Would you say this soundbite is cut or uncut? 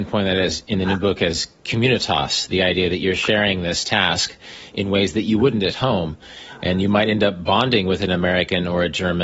uncut